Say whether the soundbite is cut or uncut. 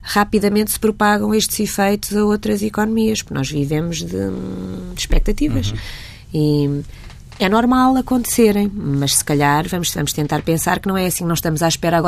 uncut